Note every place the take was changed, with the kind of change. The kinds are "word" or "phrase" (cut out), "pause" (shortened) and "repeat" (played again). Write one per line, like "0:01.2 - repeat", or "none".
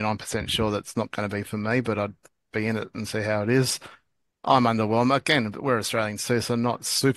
none